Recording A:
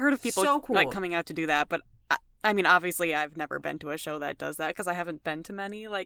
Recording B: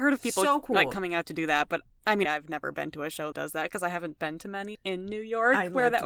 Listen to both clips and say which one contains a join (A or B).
B